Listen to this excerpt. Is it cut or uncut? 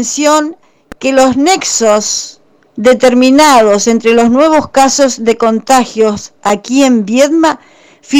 uncut